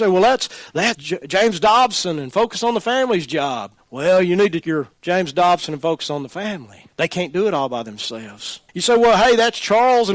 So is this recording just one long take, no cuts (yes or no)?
no